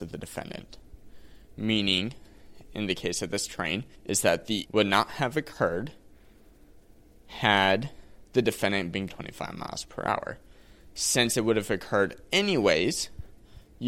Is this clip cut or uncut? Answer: cut